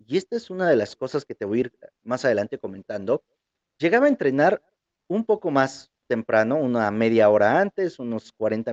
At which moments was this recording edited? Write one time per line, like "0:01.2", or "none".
none